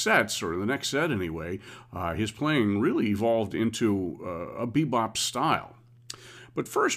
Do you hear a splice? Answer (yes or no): no